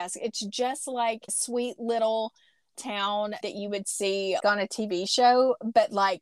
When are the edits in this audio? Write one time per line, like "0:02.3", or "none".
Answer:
0:01.3
0:02.7
0:03.4
0:04.4